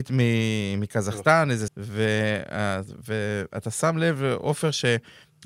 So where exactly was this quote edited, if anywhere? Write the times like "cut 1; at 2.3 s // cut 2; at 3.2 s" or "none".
cut 1; at 1.7 s